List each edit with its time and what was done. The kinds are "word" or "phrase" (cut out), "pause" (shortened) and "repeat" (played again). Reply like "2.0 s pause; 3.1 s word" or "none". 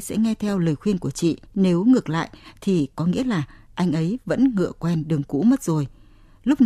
1.5 s pause